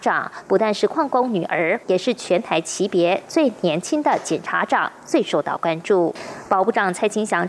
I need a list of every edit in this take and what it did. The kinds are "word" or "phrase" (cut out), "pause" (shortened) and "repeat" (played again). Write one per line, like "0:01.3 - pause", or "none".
0:01.8 - phrase